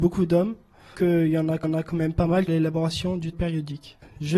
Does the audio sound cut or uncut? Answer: cut